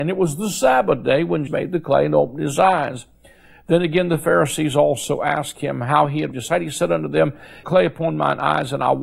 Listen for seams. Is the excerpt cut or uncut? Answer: cut